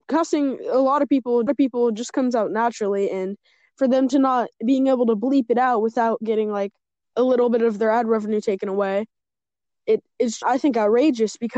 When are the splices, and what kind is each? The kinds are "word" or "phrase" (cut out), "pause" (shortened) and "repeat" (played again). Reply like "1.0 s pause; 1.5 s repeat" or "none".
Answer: 1.5 s repeat; 4.5 s pause; 7.1 s word; 10.4 s word